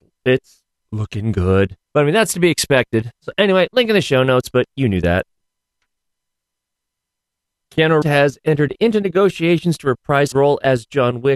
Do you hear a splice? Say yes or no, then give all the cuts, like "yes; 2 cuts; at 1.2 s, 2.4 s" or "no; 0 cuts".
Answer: yes; 4 cuts; at 1.8 s, 3.2 s, 8.0 s, 10.3 s